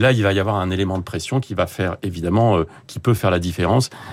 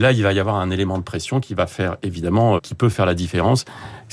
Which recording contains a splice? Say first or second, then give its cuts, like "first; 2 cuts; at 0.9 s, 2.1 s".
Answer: second; 1 cut; at 2.6 s